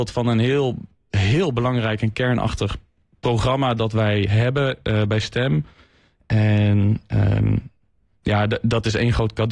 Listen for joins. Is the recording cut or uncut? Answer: uncut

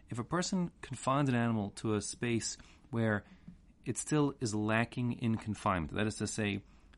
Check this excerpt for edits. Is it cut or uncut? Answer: uncut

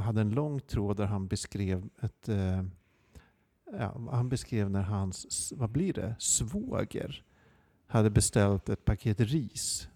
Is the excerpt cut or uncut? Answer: uncut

